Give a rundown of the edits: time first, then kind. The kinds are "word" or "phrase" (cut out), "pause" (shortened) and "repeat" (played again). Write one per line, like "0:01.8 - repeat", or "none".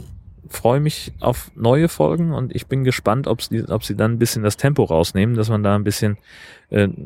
none